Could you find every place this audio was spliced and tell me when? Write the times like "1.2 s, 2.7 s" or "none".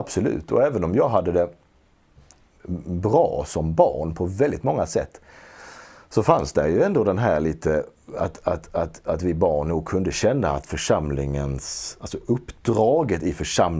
none